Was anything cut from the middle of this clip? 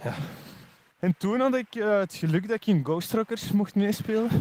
no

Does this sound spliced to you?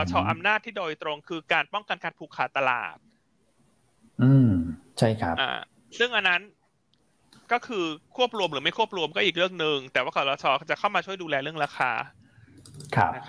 no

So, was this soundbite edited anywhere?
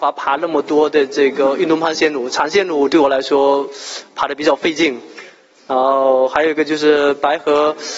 no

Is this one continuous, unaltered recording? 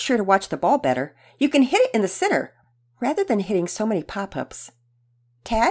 yes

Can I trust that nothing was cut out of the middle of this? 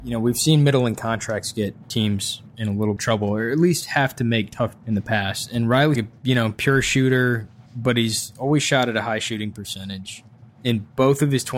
no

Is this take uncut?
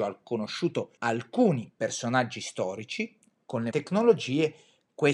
no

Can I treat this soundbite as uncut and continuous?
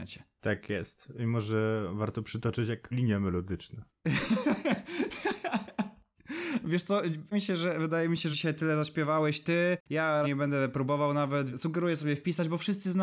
no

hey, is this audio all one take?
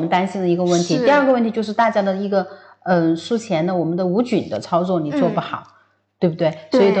yes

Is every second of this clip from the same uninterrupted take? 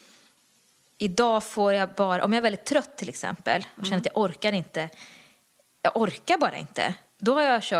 yes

